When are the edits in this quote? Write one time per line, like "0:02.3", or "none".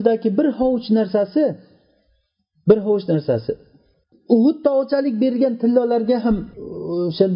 none